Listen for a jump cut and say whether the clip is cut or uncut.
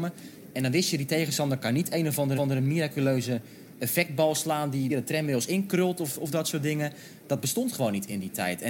cut